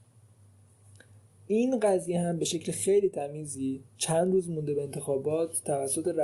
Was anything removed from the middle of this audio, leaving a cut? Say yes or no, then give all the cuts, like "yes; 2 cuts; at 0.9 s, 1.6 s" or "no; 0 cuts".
yes; 1 cut; at 3.9 s